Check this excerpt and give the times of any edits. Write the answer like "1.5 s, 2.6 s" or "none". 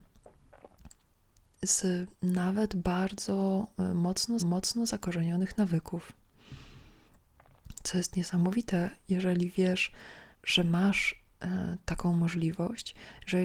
2.1 s, 4.4 s, 10.3 s